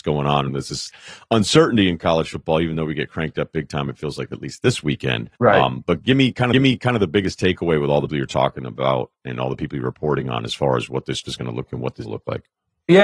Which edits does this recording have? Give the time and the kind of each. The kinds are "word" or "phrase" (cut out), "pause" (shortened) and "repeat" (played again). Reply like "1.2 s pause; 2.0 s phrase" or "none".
5.4 s pause; 6.5 s repeat; 8.1 s word; 11.2 s word; 11.7 s word; 12.0 s phrase

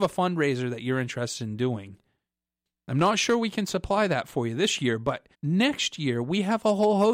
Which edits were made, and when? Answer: 5.3 s pause

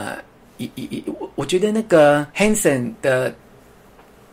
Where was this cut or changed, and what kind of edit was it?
2.3 s pause

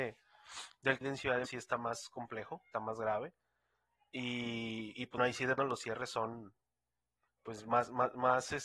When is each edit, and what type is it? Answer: 1.0 s word; 1.4 s word; 2.7 s word; 5.2 s word; 5.6 s word; 7.3 s word

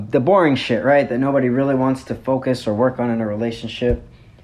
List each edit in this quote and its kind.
none

